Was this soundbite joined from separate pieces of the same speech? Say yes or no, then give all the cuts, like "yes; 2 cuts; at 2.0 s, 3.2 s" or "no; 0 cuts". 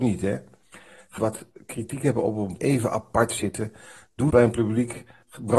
yes; 3 cuts; at 1.2 s, 2.6 s, 4.3 s